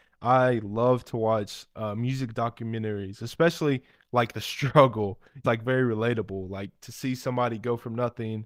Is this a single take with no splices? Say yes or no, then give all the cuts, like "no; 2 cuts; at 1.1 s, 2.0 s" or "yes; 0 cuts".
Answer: no; 1 cut; at 5.4 s